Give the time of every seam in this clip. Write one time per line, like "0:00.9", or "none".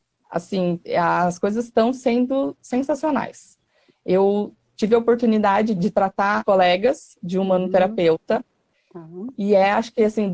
0:05.7
0:06.4